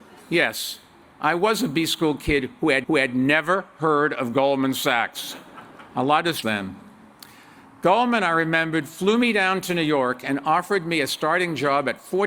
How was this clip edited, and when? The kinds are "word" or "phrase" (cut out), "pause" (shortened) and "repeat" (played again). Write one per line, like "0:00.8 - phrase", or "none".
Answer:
0:02.8 - repeat
0:06.4 - phrase